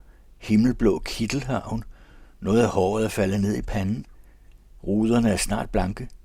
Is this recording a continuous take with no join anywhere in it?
yes; 0 cuts

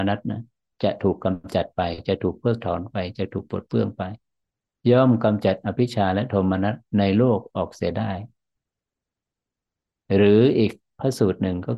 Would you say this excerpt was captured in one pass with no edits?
yes; 0 cuts

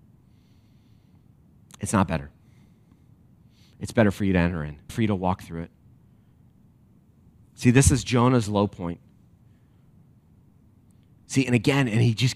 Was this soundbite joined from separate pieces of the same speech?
yes; 1 cut; at 4.9 s

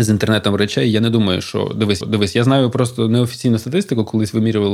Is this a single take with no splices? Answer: no; 1 cut; at 2.0 s

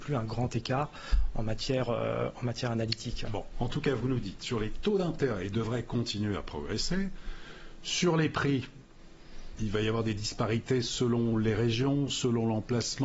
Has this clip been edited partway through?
no; 0 cuts

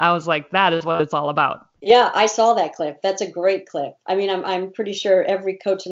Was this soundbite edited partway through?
yes; 1 cut; at 1.8 s

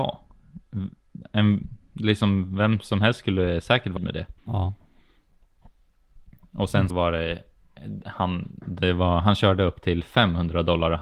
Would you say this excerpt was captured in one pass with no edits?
no; 3 cuts; at 4.0 s, 4.4 s, 6.9 s

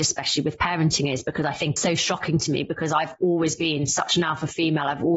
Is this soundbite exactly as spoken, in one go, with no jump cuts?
no; 1 cut; at 1.8 s

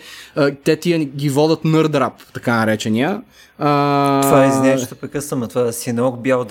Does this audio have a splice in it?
no; 0 cuts

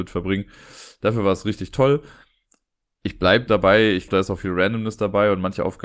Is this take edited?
yes; 2 cuts; at 3.5 s, 4.1 s

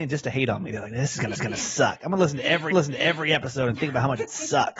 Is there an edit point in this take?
yes; 2 cuts; at 1.3 s, 2.7 s

